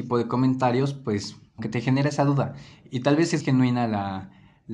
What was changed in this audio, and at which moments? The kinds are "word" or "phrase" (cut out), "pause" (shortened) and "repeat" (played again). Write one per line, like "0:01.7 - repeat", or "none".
0:01.6 - word
0:03.4 - word